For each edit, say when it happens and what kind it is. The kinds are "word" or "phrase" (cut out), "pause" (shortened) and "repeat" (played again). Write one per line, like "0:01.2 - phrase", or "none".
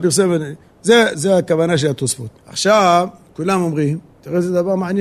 0:01.1 - word
0:02.4 - pause